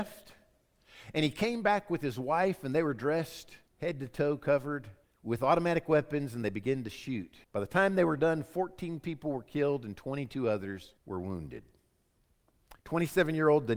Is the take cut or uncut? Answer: cut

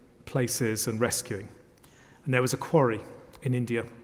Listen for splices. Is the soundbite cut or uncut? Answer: uncut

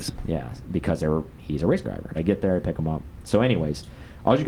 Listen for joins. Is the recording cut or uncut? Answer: cut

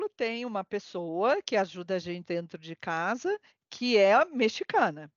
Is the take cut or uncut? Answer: cut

